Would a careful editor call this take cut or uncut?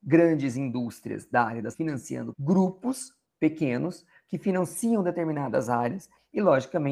cut